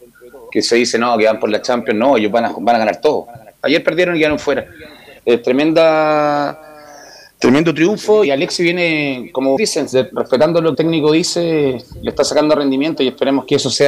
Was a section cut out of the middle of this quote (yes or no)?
yes